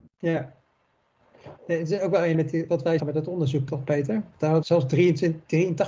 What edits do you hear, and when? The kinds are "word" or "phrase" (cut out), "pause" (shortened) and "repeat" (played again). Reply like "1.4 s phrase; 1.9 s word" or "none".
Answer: 2.3 s word; 2.7 s word; 3.0 s word; 3.7 s word; 4.6 s word